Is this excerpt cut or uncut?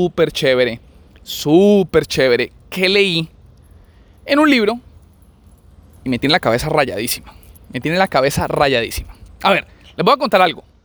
uncut